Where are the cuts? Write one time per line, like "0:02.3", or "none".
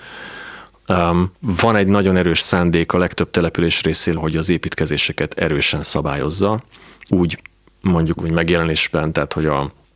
0:01.4
0:04.2
0:08.2